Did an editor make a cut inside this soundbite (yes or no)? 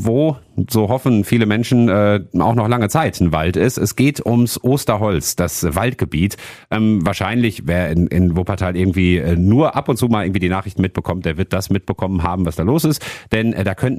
no